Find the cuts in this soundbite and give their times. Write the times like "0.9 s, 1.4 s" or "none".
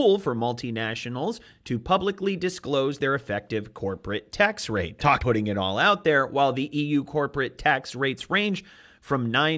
5.2 s